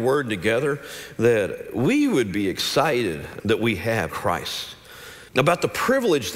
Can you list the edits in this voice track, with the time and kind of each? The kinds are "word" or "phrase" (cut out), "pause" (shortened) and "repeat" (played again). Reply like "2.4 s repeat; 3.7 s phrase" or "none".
3.4 s phrase; 4.1 s word; 5.3 s pause